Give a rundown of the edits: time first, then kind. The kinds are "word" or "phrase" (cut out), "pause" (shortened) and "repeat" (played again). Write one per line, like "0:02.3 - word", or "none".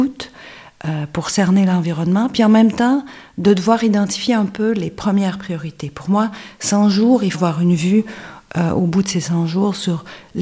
0:07.3 - phrase